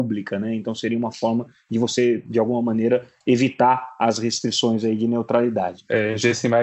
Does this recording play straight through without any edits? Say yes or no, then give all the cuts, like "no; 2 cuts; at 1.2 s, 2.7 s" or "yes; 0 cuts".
yes; 0 cuts